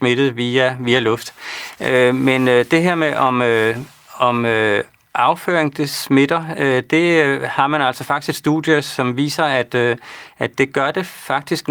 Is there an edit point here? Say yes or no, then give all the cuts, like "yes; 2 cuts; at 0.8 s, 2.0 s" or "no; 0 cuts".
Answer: no; 0 cuts